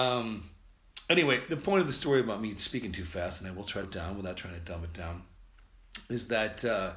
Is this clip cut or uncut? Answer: cut